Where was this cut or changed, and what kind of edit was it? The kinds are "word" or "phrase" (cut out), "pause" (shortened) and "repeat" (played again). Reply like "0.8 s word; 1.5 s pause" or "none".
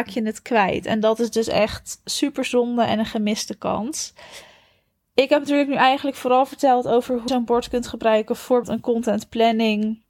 7.3 s word; 8.6 s word